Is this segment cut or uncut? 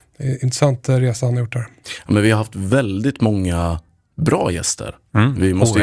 uncut